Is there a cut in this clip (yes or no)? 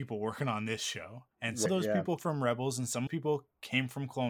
yes